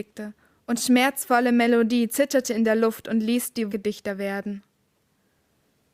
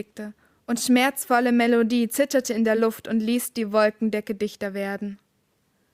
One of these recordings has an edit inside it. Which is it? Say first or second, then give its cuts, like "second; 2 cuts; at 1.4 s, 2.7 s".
first; 1 cut; at 3.7 s